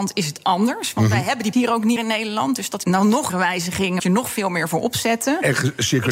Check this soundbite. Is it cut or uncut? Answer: cut